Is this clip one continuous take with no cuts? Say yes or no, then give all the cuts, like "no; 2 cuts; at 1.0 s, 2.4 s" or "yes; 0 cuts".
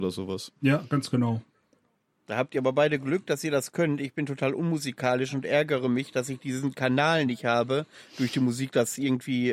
yes; 0 cuts